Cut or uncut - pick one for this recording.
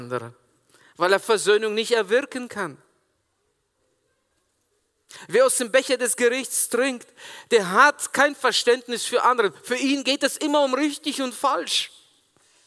uncut